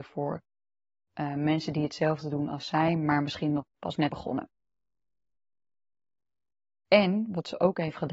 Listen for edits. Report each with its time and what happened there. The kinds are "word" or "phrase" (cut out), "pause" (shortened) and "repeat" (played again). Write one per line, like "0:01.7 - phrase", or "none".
0:04.1 - word